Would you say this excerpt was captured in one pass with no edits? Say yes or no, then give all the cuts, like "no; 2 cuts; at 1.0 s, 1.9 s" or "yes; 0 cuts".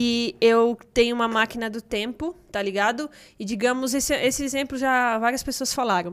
yes; 0 cuts